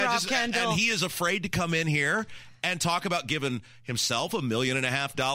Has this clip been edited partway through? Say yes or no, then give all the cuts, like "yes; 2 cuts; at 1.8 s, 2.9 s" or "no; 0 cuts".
no; 0 cuts